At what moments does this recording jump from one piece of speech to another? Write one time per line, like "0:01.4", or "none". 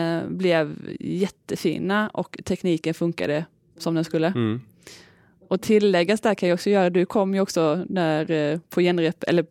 none

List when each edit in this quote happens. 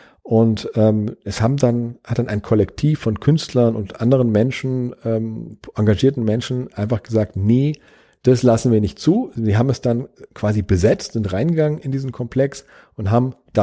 none

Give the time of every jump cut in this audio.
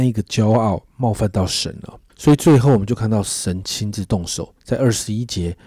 0:02.1
0:04.6

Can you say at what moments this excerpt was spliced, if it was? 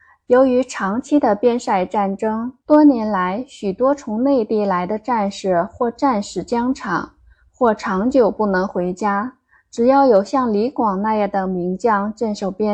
0:02.6

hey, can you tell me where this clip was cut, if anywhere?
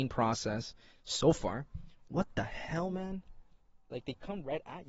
none

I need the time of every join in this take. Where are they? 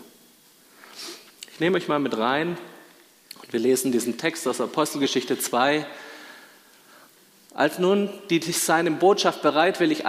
none

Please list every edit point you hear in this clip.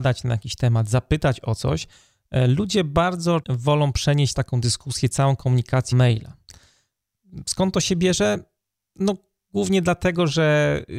0:03.4
0:04.3
0:05.9

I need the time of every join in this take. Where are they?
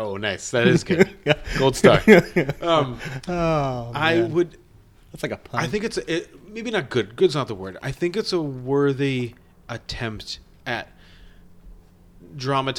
none

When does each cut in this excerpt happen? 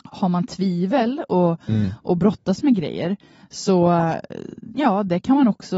none

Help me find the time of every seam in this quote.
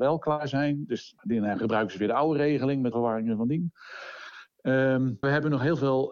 0:01.2
0:02.9
0:05.2

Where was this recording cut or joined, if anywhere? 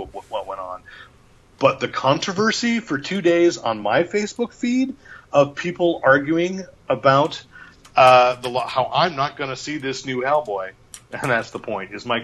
none

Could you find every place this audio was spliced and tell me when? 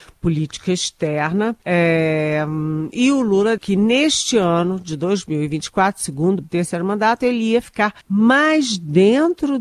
0:01.6
0:03.6
0:06.4
0:08.0

